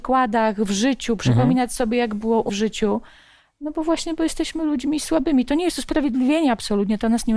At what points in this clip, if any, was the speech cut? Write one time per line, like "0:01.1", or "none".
0:02.5

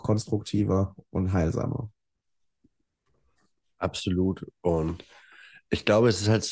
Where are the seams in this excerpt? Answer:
none

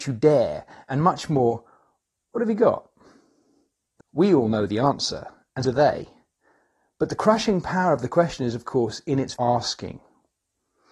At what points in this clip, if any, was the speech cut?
0:04.0
0:05.6
0:09.3

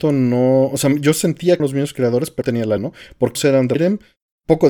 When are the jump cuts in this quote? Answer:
0:01.6
0:02.4
0:02.8
0:03.4
0:03.8

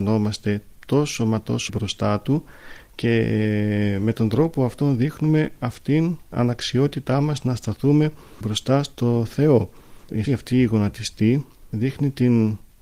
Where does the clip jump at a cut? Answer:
0:01.7
0:06.3
0:08.4
0:10.2

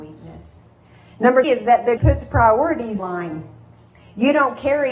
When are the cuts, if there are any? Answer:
0:01.4
0:02.0
0:03.0

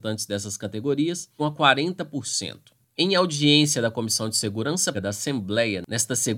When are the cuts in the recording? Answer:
0:01.4
0:04.9

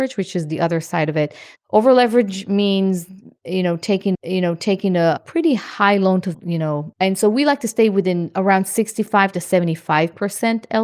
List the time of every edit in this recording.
0:01.6
0:04.1
0:06.3
0:06.9

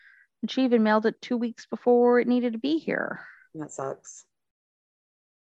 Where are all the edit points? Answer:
none

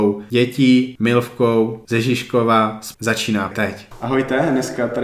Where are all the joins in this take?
0:02.9
0:03.5

